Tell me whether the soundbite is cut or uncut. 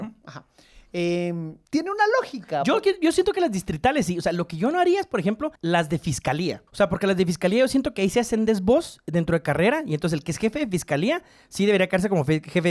cut